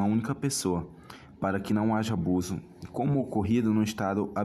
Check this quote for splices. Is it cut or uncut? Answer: uncut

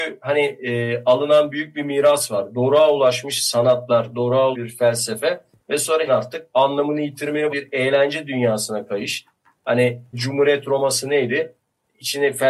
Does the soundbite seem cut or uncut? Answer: cut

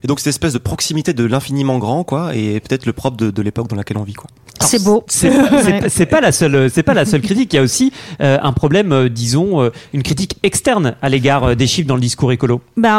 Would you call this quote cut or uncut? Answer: uncut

